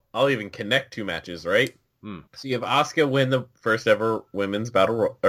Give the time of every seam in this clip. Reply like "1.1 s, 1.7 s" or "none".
2.3 s